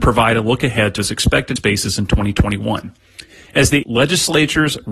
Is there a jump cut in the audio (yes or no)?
yes